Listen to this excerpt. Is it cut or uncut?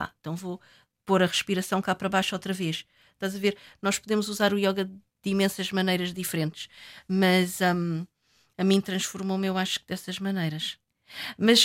uncut